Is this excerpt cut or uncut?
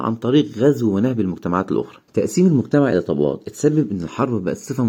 cut